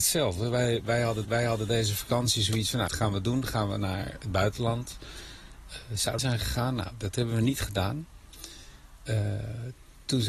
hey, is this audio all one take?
no; 3 cuts; at 1.2 s, 2.9 s, 6.2 s

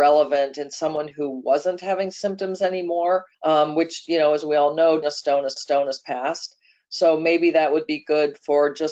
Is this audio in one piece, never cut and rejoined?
no; 3 cuts; at 3.3 s, 5.0 s, 5.6 s

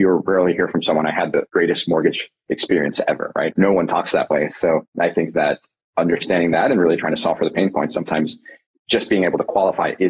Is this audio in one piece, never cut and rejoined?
yes; 0 cuts

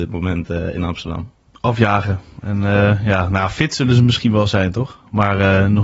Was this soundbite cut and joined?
no; 0 cuts

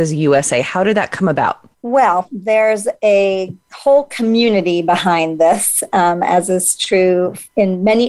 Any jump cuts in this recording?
yes; 1 cut; at 1.7 s

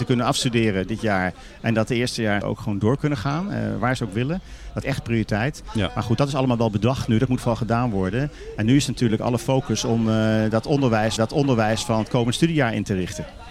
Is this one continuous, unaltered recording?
no; 4 cuts; at 2.4 s, 4.0 s, 4.8 s, 11.2 s

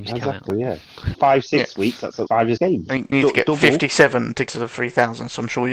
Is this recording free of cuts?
no; 5 cuts; at 1.1 s, 2.3 s, 2.6 s, 3.1 s, 4.5 s

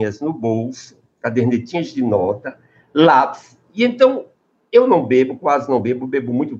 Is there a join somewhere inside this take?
no; 0 cuts

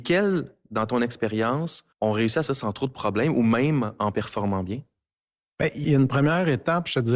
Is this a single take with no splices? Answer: no; 3 cuts; at 1.9 s, 2.5 s, 5.8 s

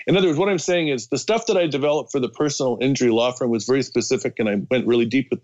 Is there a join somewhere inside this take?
no; 0 cuts

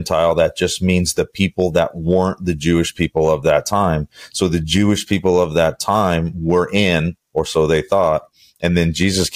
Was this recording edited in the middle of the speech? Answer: no; 0 cuts

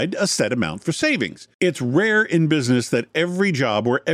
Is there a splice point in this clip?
yes; 1 cut; at 1.5 s

